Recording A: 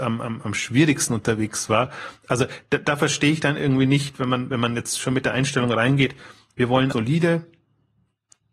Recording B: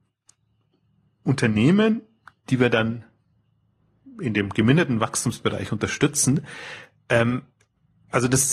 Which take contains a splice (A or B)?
A